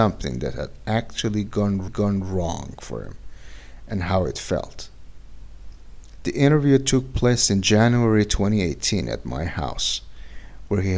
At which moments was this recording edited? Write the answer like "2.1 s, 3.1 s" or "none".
1.9 s